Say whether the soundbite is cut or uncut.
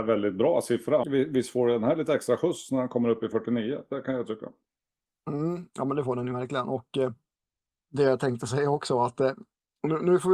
cut